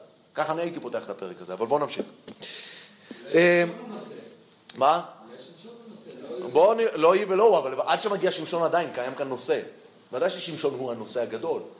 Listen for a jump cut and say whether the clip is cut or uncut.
uncut